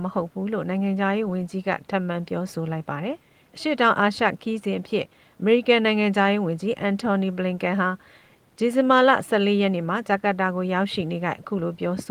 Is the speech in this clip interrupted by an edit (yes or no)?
yes